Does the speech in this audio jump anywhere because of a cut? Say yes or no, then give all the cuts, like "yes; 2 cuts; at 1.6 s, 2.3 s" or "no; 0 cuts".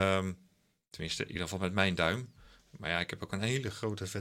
no; 0 cuts